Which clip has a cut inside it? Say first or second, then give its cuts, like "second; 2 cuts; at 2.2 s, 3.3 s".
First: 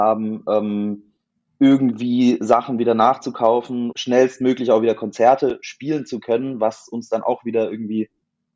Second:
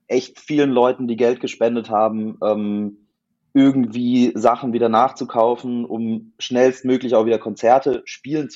first; 1 cut; at 3.9 s